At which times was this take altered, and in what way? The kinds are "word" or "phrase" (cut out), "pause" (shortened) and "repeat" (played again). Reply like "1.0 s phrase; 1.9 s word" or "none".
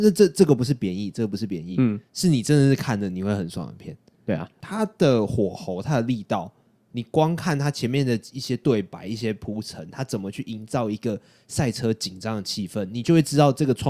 none